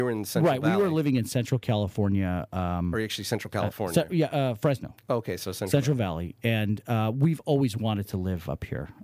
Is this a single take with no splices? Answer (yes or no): yes